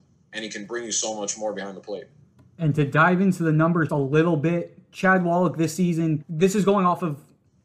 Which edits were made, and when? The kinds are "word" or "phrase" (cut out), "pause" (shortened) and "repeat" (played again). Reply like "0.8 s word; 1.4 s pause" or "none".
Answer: 3.9 s word; 6.2 s word